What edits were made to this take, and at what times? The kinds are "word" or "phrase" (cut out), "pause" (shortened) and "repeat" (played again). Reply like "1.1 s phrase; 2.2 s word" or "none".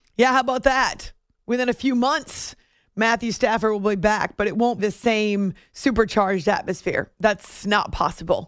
4.8 s word